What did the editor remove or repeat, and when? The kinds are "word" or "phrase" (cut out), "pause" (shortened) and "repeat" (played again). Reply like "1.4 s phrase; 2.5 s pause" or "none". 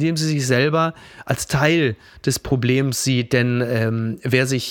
none